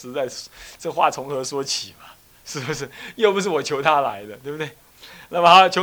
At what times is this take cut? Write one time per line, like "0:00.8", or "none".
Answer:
none